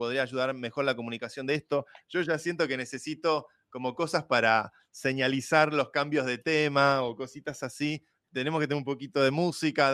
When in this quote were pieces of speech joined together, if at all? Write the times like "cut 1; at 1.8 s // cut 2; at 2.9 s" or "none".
none